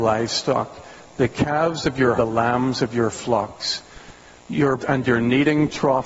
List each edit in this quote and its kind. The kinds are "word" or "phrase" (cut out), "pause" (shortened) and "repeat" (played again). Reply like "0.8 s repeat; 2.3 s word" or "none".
2.2 s phrase; 4.8 s word